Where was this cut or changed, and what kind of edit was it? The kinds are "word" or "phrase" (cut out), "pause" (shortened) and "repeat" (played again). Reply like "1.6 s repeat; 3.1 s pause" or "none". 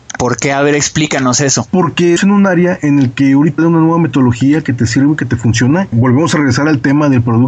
2.2 s word; 3.6 s word